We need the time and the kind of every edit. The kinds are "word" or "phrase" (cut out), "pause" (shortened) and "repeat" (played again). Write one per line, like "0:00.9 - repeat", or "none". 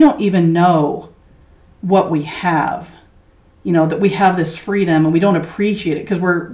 none